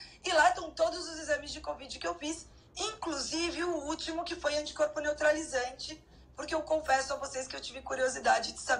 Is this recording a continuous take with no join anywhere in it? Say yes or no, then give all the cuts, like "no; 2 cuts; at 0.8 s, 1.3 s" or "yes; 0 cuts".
yes; 0 cuts